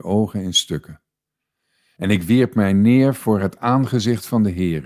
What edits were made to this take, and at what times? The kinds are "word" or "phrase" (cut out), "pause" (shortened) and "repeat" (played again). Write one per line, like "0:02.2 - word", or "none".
none